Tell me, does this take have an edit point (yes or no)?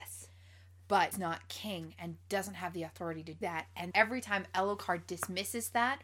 yes